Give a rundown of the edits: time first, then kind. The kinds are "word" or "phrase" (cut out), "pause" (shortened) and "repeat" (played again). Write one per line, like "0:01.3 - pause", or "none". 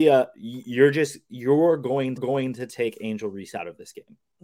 0:02.2 - repeat